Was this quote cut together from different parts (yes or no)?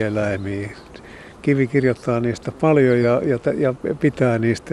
no